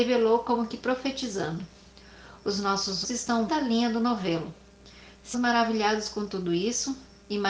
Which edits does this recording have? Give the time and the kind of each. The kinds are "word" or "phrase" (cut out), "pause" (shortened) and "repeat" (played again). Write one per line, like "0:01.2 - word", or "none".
0:03.0 - word
0:03.5 - phrase
0:05.3 - word